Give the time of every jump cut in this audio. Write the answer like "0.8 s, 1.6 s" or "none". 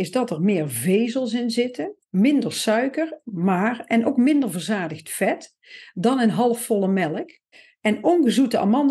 2.0 s, 7.5 s

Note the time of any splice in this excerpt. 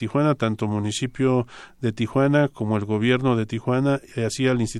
none

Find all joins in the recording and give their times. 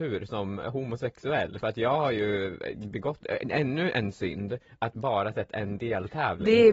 none

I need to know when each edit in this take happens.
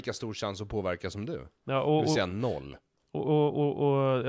none

